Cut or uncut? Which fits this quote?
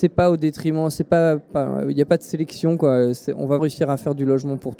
cut